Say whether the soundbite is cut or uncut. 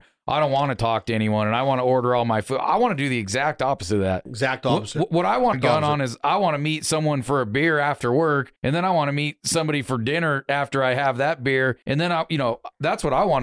cut